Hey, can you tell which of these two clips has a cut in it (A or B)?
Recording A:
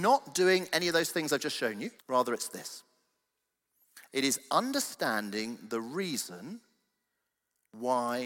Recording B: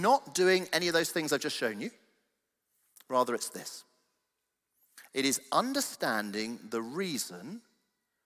A